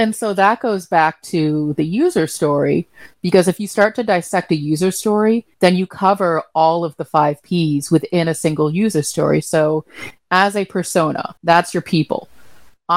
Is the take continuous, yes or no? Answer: no